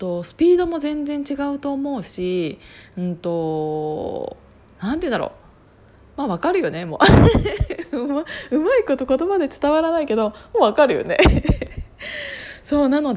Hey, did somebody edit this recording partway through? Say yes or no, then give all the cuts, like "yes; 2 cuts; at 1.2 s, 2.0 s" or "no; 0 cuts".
no; 0 cuts